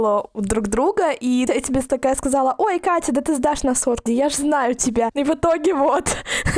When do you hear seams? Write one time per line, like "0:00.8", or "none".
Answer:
0:01.5
0:04.1